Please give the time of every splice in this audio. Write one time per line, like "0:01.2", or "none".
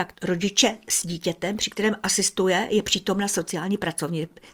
none